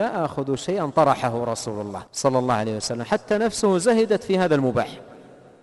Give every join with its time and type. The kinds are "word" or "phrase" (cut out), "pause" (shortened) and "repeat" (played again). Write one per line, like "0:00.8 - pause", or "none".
0:02.1 - pause